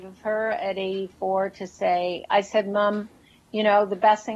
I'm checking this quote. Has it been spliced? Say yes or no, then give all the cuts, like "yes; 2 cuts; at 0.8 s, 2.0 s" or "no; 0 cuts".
no; 0 cuts